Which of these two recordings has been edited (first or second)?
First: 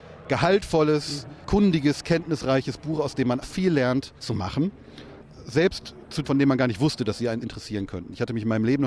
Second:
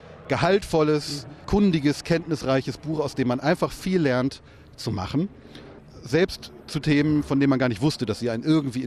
first